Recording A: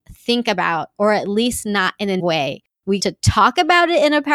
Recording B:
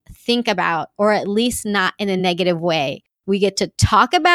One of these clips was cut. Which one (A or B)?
A